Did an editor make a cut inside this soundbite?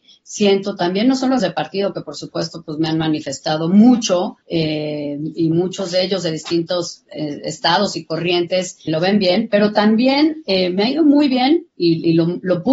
yes; 3 cuts; at 1.4 s, 4.4 s, 8.9 s

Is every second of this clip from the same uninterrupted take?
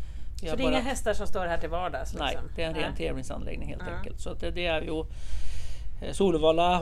yes; 0 cuts

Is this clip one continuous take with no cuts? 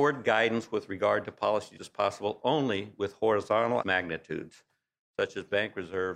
no; 2 cuts; at 1.8 s, 3.8 s

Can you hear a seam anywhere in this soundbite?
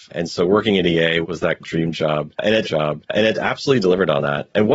yes; 3 cuts; at 1.2 s, 1.6 s, 2.6 s

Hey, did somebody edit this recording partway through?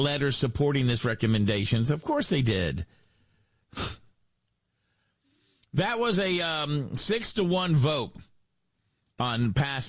no; 0 cuts

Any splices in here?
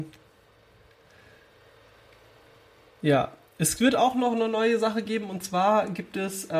no; 0 cuts

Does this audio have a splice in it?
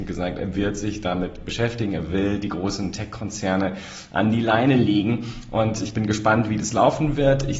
no; 0 cuts

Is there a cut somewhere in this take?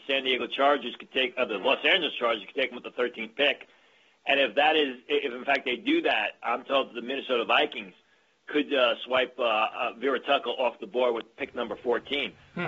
no; 0 cuts

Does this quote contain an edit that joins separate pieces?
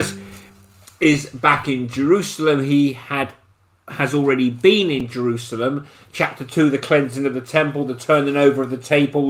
no; 0 cuts

